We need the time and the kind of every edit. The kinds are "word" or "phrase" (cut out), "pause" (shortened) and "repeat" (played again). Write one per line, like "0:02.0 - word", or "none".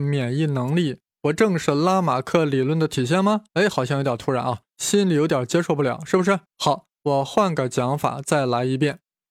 0:03.5 - pause
0:04.7 - pause
0:06.5 - pause